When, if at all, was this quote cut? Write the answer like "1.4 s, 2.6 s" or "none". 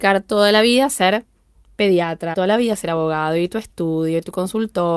2.3 s